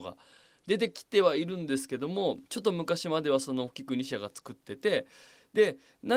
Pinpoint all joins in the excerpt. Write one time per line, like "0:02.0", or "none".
0:02.5